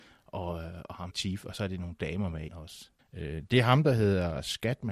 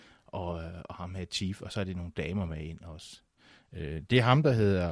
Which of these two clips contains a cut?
first; 3 cuts; at 1.1 s, 2.5 s, 3.0 s

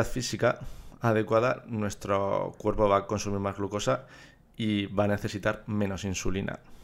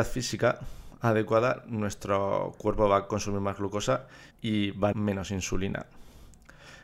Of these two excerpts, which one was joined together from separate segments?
second; 2 cuts; at 4.3 s, 4.9 s

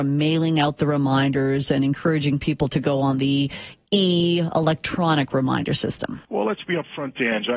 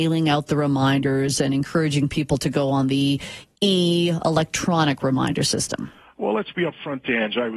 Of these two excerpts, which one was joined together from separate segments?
first; 1 cut; at 6.2 s

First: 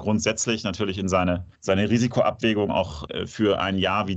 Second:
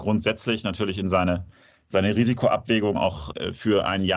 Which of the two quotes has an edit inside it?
first; 1 cut; at 1.5 s

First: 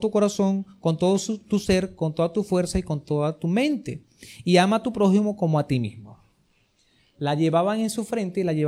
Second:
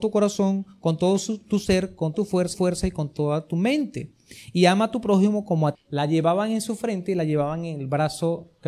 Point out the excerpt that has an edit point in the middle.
second; 3 cuts; at 2.1 s, 2.5 s, 5.7 s

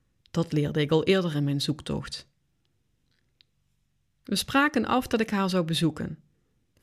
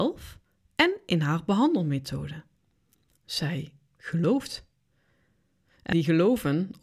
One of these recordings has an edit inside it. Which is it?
second; 1 cut; at 5.9 s

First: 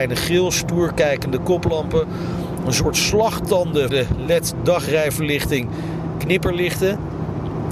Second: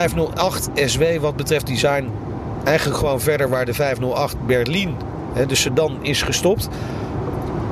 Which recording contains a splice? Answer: first; 2 cuts; at 3.9 s, 6.1 s

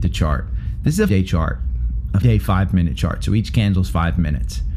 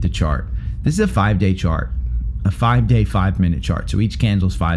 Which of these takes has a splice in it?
first; 2 cuts; at 1.1 s, 2.2 s

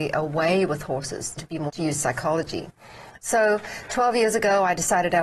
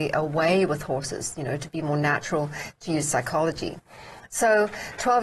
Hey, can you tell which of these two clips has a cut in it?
first; 2 cuts; at 1.4 s, 1.7 s

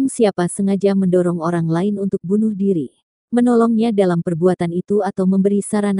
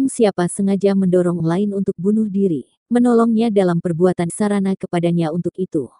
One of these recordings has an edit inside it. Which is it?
second; 3 cuts; at 1.4 s, 2.8 s, 4.3 s

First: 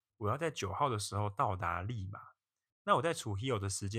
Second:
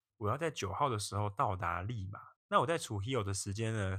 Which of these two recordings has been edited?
second; 1 cut; at 2.4 s

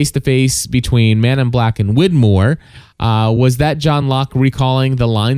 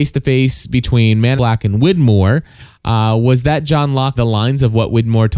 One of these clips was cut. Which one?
second; 2 cuts; at 1.4 s, 4.2 s

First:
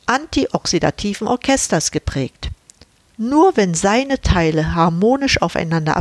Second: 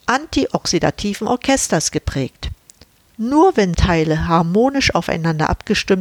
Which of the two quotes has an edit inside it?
second; 1 cut; at 3.7 s

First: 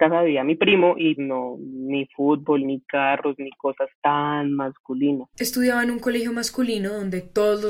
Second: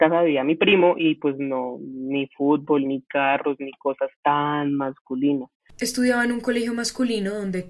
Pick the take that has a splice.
first; 2 cuts; at 1.2 s, 5.3 s

